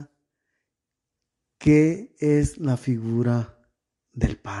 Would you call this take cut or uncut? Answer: uncut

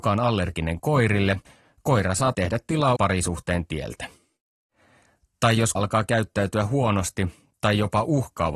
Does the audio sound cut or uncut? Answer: cut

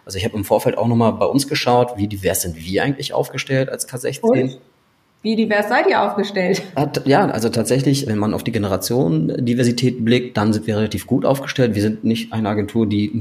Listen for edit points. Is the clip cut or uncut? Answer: uncut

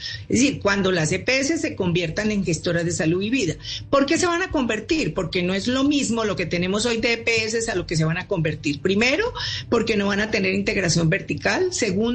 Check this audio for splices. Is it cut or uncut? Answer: uncut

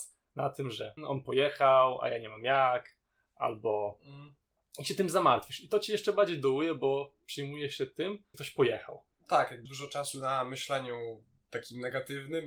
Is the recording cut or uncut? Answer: cut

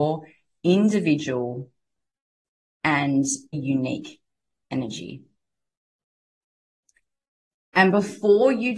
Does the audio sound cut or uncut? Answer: cut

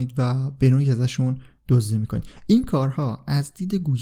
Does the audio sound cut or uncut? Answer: uncut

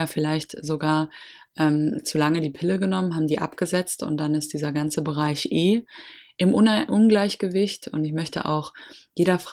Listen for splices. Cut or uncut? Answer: uncut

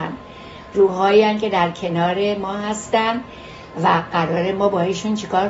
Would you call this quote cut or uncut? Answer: uncut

